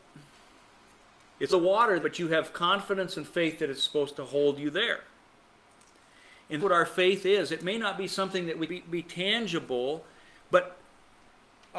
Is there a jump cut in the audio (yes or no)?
yes